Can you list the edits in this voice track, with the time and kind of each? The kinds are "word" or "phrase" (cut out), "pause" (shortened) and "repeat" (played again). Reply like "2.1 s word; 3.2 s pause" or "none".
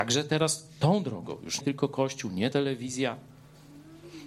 1.6 s word; 2.5 s word